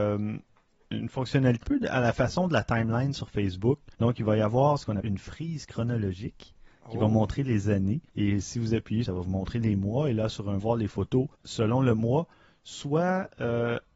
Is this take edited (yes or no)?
yes